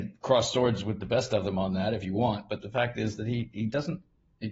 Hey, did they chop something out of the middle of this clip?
no; 0 cuts

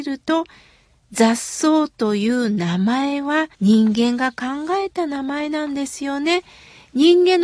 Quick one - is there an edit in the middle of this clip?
yes; 1 cut; at 3.5 s

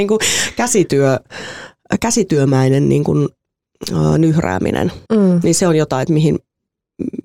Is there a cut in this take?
yes; 1 cut; at 5.0 s

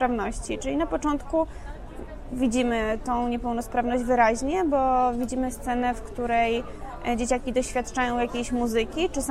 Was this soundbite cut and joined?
no; 0 cuts

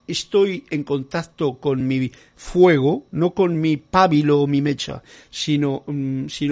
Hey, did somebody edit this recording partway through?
no; 0 cuts

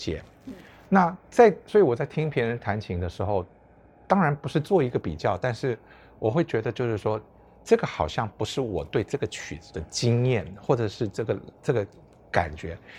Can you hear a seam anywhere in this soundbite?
no; 0 cuts

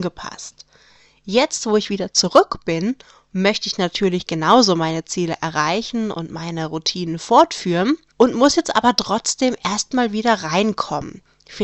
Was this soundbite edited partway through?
no; 0 cuts

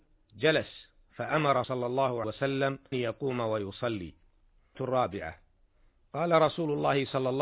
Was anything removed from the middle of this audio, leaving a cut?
yes; 4 cuts; at 1.6 s, 2.2 s, 2.9 s, 4.7 s

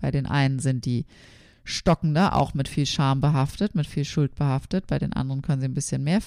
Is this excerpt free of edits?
yes; 0 cuts

